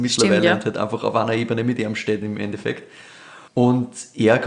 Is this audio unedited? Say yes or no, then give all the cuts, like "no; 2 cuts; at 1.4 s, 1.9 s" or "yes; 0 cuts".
no; 1 cut; at 3.5 s